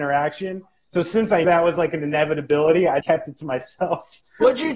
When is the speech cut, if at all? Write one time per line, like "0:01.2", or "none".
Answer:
0:01.4
0:03.0